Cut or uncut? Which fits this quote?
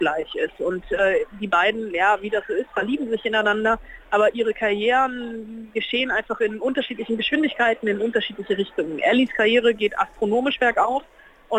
uncut